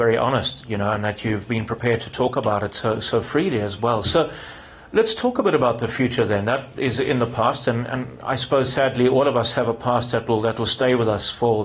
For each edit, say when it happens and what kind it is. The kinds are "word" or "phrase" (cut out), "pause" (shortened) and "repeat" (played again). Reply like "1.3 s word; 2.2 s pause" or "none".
none